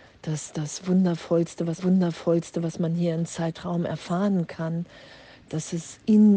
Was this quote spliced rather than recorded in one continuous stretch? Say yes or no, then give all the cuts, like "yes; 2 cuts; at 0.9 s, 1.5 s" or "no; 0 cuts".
yes; 1 cut; at 1.8 s